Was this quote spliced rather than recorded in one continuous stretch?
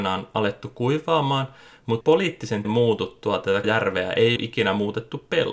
yes; 4 cuts; at 2.0 s, 2.6 s, 3.6 s, 4.4 s

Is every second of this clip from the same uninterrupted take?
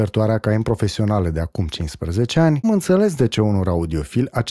no; 1 cut; at 2.6 s

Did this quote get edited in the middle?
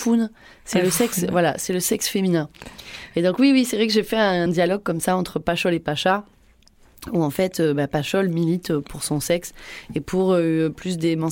no; 0 cuts

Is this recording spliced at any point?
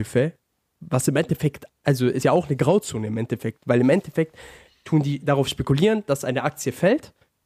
yes; 2 cuts; at 1.8 s, 2.2 s

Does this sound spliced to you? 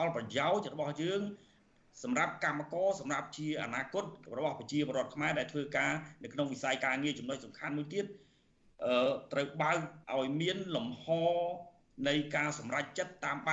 yes; 1 cut; at 10.0 s

